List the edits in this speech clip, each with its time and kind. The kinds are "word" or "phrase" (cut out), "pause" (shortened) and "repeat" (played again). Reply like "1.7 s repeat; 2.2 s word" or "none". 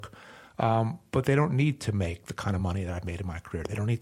none